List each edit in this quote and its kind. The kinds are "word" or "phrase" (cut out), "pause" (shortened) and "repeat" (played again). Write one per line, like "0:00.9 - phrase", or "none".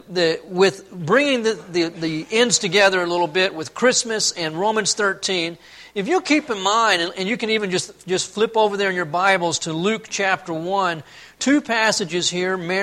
none

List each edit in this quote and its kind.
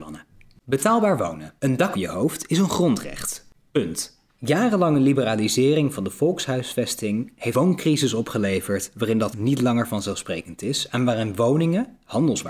0:01.6 - pause
0:01.9 - word
0:04.3 - pause
0:07.5 - word
0:09.3 - word

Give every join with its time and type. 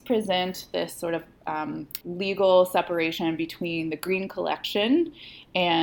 0:02.0 - pause

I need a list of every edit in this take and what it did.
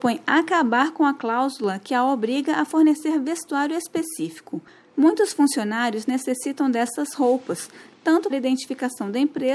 0:08.3 - word

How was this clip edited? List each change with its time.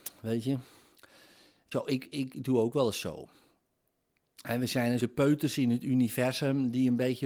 0:01.7 - word
0:05.0 - word

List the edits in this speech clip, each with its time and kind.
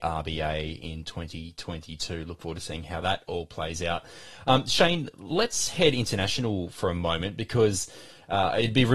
none

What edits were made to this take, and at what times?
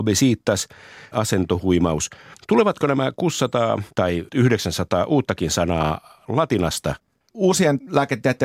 0:01.1 - phrase
0:04.3 - word

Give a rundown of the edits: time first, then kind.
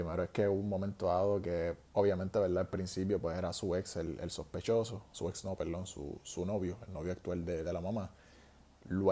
0:01.9 - pause

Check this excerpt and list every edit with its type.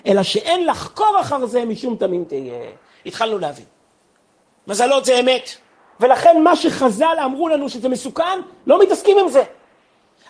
none

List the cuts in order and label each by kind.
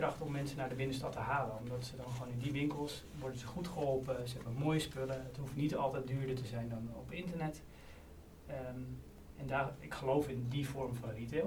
none

